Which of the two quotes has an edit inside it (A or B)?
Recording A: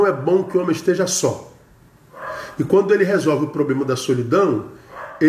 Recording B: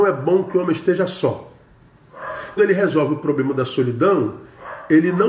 B